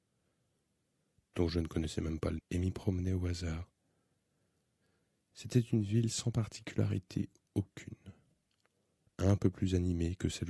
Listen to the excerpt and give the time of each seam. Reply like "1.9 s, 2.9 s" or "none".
2.4 s